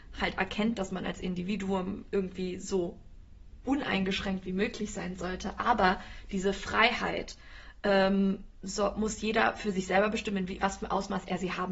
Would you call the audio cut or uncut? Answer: uncut